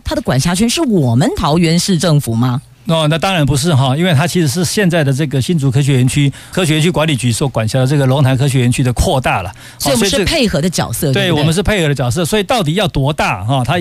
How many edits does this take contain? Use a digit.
1